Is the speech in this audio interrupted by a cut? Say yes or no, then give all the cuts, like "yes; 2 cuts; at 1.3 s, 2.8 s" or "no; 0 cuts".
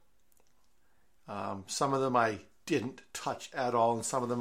no; 0 cuts